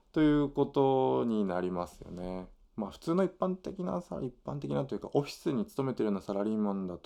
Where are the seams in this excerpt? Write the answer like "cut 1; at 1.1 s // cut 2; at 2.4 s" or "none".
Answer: none